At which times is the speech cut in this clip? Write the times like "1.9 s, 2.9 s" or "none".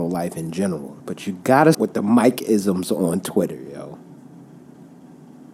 1.0 s, 1.7 s